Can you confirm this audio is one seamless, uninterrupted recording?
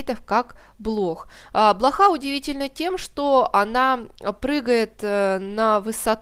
yes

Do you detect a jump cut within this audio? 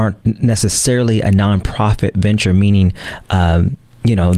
no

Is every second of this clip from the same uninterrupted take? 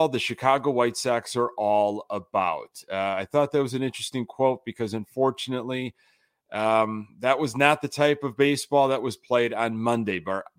yes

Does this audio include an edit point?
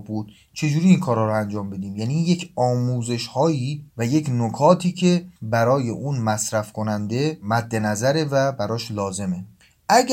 yes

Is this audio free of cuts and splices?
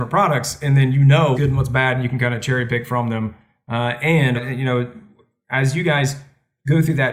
no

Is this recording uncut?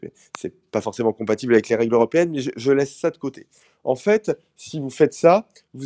yes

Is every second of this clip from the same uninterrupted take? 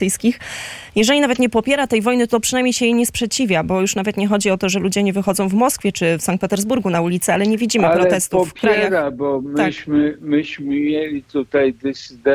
no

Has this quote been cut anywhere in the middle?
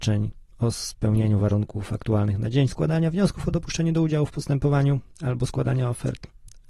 no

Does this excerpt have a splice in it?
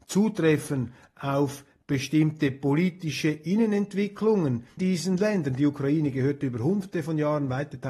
yes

